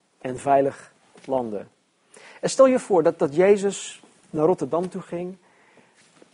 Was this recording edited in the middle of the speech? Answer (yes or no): no